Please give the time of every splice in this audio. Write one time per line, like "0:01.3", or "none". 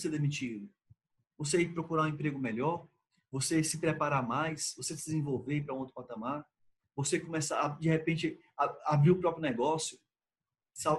none

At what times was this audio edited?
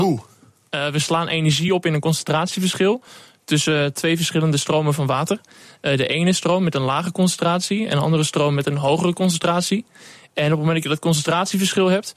none

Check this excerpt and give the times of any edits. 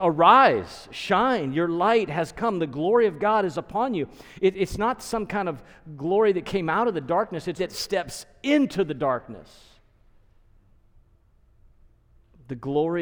0:07.6

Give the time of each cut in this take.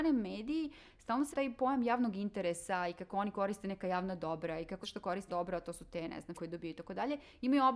0:01.3
0:04.8
0:05.3
0:06.3

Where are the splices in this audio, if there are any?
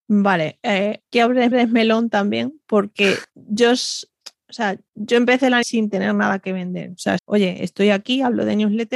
0:01.1
0:01.5
0:03.3
0:04.9
0:05.6
0:07.2

